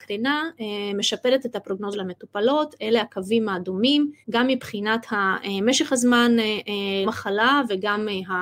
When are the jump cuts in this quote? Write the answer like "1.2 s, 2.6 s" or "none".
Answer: 1.9 s, 4.2 s, 7.0 s